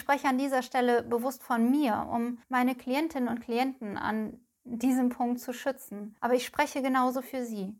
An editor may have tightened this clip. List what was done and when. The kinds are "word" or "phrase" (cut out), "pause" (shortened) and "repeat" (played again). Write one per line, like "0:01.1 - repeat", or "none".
0:02.4 - pause
0:06.2 - pause